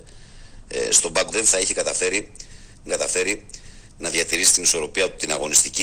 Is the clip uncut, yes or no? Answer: no